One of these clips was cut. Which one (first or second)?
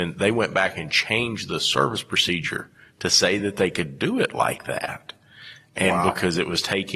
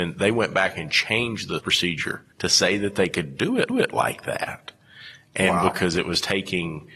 second